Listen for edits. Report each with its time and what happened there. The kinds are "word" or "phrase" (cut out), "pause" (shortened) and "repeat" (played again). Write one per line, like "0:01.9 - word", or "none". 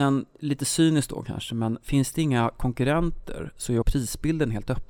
0:03.8 - word